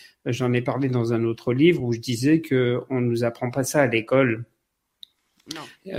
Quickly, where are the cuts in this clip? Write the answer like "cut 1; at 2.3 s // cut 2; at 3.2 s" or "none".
none